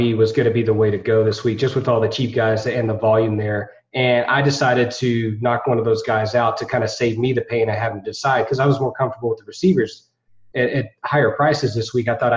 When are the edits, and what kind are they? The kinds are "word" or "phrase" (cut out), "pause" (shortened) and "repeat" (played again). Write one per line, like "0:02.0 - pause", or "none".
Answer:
none